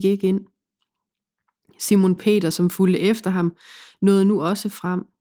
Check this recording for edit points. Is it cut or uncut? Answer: uncut